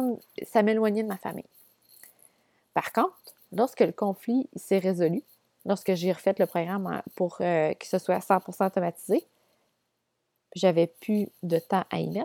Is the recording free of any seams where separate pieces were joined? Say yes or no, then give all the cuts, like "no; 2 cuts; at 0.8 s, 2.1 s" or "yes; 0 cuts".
yes; 0 cuts